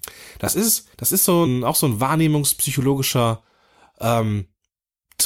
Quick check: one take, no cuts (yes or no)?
no